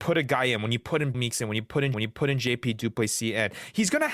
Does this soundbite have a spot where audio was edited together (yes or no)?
yes